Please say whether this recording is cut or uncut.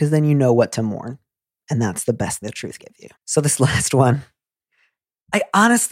cut